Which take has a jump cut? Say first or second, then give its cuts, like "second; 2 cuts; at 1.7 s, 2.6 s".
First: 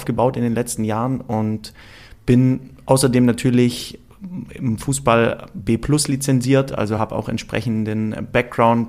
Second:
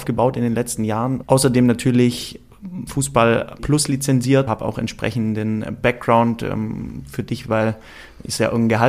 second; 5 cuts; at 1.2 s, 2.9 s, 3.6 s, 4.5 s, 7.4 s